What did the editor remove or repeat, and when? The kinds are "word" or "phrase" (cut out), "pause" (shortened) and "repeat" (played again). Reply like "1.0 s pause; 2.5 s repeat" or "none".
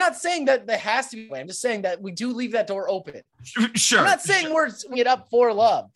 1.3 s word; 4.9 s word